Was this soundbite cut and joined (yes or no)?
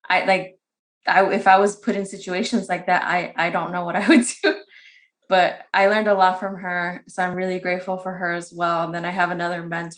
no